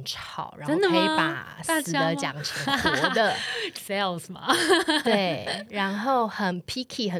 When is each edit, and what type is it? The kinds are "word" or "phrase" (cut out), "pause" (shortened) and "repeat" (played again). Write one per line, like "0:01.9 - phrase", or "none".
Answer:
0:03.8 - word